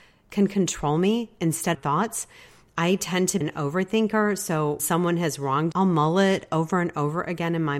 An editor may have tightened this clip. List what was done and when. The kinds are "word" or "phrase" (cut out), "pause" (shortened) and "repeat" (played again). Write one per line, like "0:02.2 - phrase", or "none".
0:01.7 - phrase
0:03.4 - word
0:04.8 - word
0:05.7 - word